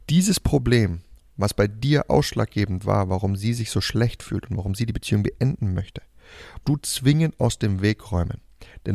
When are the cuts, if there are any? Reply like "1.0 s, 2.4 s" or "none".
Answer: 6.6 s